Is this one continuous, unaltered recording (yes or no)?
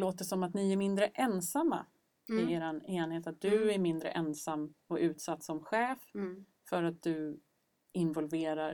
yes